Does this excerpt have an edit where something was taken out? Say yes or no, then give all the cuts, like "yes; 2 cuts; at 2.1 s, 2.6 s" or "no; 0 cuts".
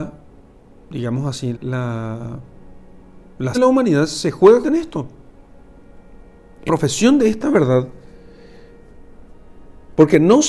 yes; 4 cuts; at 1.5 s, 3.5 s, 4.6 s, 6.7 s